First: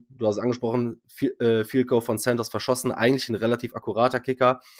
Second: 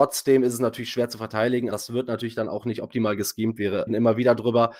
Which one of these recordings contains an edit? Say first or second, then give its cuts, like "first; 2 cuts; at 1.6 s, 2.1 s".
second; 2 cuts; at 1.7 s, 3.9 s